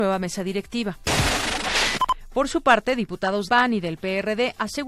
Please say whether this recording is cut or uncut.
cut